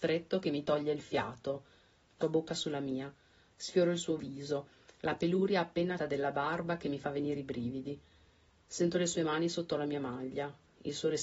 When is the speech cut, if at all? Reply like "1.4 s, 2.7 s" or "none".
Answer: 2.2 s, 6.0 s

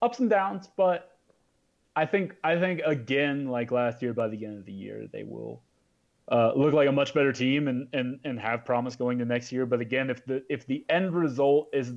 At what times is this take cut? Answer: none

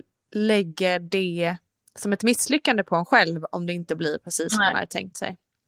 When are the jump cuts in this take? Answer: none

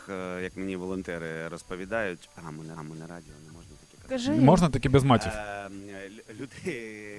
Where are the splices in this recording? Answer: 2.8 s

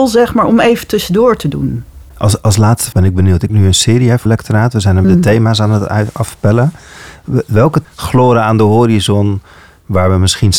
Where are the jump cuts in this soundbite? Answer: 2.9 s, 3.5 s, 4.3 s, 5.0 s, 7.8 s

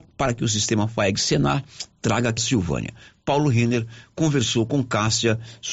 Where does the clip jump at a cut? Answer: 2.4 s

